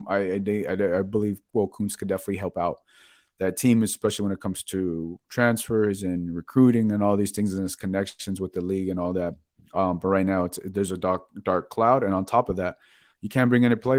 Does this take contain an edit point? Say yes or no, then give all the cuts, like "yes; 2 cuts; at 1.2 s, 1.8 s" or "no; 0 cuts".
no; 0 cuts